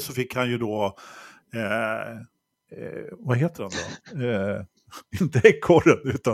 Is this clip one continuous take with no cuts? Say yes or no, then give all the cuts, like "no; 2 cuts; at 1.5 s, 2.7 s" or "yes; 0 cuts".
yes; 0 cuts